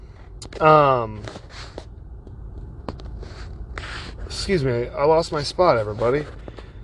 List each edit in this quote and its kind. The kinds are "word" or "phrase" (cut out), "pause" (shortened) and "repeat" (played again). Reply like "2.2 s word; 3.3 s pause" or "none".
none

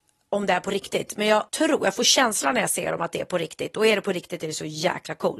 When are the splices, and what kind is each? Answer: 1.5 s pause

